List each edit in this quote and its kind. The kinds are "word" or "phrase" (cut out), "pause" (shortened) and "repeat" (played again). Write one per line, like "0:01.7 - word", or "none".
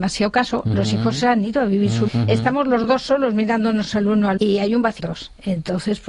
0:02.1 - word
0:04.4 - word
0:05.0 - phrase

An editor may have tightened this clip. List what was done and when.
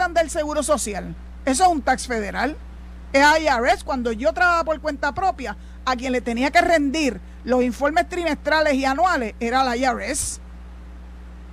none

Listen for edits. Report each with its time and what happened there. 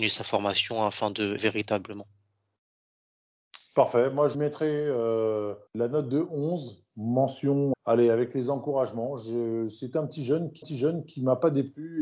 0:01.4 - word
0:04.3 - word
0:05.7 - pause
0:07.7 - word
0:10.6 - repeat

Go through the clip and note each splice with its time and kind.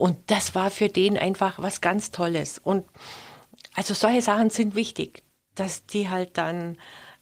none

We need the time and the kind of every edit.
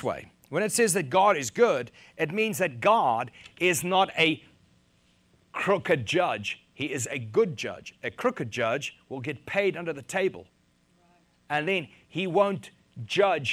none

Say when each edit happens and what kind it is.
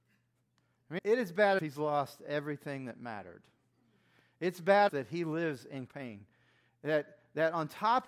0:01.0 - word
0:01.6 - word
0:04.9 - word
0:05.9 - word

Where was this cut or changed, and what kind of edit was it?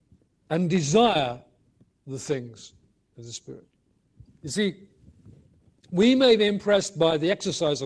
none

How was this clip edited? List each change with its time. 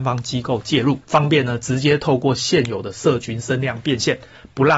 0:01.0 - pause

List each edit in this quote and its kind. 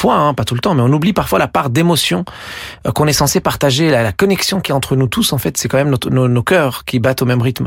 none

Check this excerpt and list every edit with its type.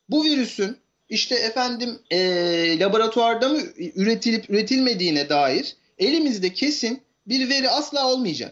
0:02.0 - pause

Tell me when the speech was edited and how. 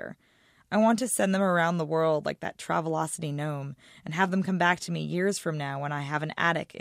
none

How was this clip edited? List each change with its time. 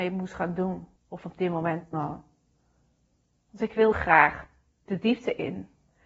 0:01.0 - pause
0:01.9 - word
0:03.9 - word
0:04.9 - word

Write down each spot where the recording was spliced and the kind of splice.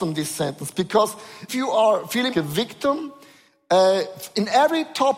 0:01.5 - word
0:02.3 - word

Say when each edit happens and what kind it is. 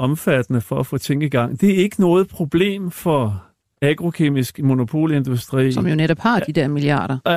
none

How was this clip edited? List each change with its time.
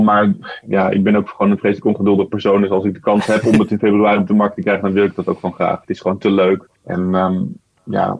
0:06.8 - pause

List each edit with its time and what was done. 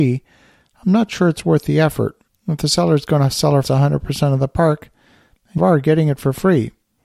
0:02.3 - pause
0:03.6 - word
0:05.6 - phrase

